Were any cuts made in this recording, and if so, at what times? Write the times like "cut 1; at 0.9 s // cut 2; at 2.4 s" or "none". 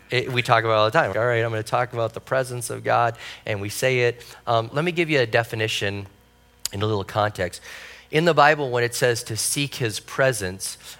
cut 1; at 1.1 s // cut 2; at 4.7 s